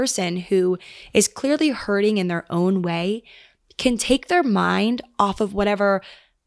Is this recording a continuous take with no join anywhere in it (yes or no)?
yes